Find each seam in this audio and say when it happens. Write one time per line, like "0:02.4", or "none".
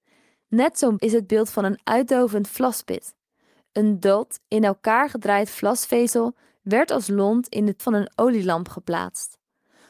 0:01.0
0:07.8